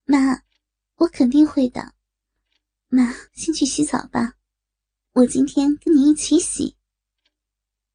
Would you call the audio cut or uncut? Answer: cut